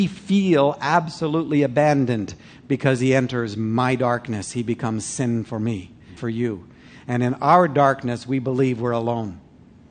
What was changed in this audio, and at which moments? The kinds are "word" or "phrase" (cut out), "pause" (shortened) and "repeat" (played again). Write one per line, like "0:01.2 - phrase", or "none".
0:06.2 - word